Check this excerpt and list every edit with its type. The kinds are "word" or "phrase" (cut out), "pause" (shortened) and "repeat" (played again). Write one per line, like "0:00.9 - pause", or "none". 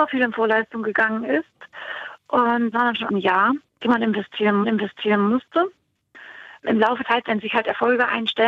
0:02.7 - word
0:03.1 - phrase
0:04.6 - repeat
0:07.0 - word